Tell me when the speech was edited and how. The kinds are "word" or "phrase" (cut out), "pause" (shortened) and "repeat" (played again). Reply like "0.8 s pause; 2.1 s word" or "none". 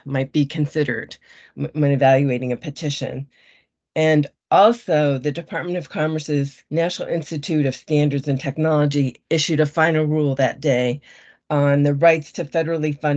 6.7 s pause